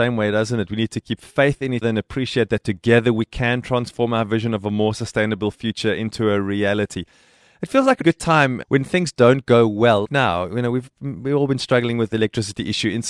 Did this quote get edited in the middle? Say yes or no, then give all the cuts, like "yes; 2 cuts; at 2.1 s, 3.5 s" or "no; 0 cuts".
yes; 4 cuts; at 1.8 s, 8.0 s, 8.6 s, 10.0 s